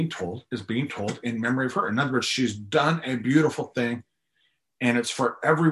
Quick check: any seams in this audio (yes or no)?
no